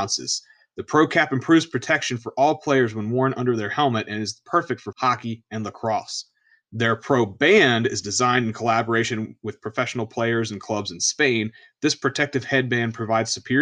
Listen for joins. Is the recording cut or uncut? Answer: cut